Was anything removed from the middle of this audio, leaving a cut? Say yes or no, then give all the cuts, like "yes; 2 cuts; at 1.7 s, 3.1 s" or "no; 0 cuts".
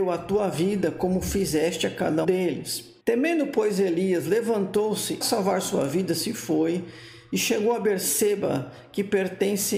yes; 3 cuts; at 2.2 s, 3.0 s, 5.2 s